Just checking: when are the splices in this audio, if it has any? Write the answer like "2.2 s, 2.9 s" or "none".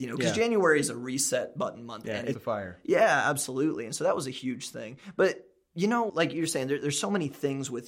2.3 s, 6.1 s